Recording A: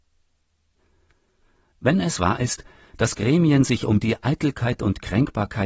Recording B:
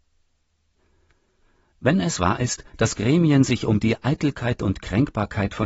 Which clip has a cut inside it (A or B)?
B